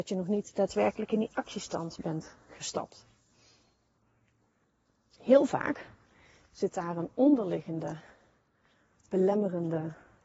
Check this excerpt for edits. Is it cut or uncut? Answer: uncut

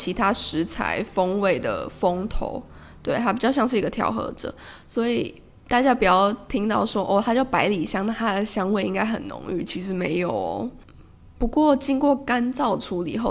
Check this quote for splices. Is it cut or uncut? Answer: uncut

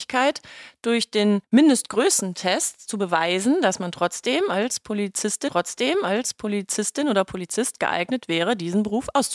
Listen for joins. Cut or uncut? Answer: cut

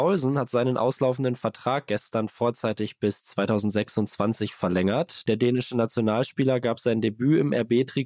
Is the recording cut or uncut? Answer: uncut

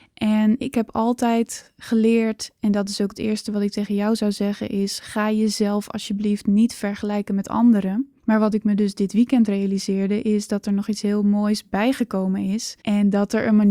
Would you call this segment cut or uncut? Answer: cut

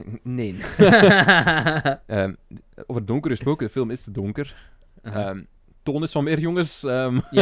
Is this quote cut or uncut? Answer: uncut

